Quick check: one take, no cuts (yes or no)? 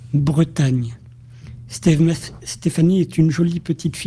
yes